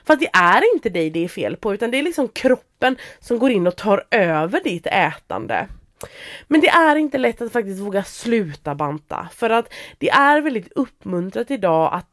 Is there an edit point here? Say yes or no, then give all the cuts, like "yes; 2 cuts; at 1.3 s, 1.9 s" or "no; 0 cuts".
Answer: no; 0 cuts